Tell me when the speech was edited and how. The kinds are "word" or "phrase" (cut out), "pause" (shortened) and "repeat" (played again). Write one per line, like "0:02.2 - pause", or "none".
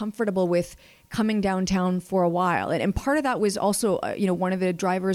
none